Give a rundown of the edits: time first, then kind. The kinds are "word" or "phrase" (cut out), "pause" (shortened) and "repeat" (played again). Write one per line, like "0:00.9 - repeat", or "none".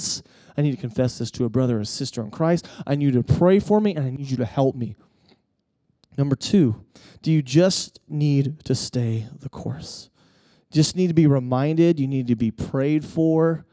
none